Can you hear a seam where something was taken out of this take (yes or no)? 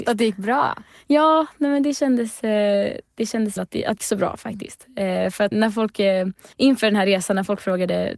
yes